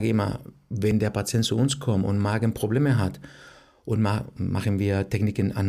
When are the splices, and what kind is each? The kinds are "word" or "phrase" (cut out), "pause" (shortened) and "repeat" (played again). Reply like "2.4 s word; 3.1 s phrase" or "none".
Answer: none